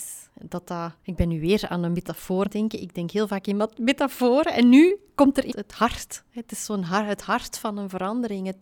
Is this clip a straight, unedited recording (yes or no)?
no